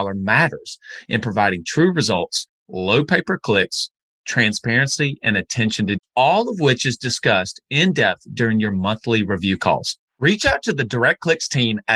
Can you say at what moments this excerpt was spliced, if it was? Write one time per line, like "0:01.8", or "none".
0:06.0
0:10.1